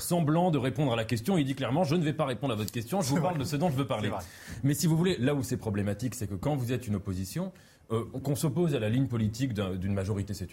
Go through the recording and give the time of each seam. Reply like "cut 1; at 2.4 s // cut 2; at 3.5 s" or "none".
none